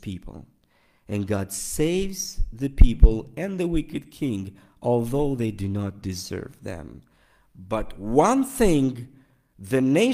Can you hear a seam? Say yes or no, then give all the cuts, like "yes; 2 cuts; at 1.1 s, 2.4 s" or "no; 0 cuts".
no; 0 cuts